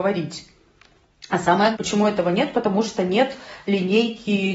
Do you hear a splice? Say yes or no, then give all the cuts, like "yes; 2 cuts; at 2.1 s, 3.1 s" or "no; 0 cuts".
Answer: yes; 1 cut; at 1.7 s